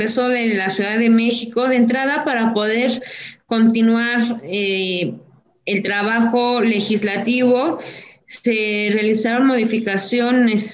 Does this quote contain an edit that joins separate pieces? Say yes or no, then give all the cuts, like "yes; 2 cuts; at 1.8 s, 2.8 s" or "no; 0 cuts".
no; 0 cuts